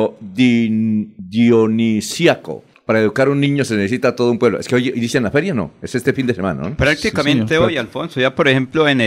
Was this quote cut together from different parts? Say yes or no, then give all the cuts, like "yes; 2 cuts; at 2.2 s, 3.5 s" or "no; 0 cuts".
no; 0 cuts